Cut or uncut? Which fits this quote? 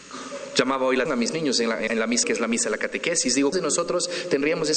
cut